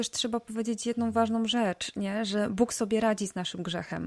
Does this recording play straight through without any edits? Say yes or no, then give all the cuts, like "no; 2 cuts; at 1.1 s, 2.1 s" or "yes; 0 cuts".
yes; 0 cuts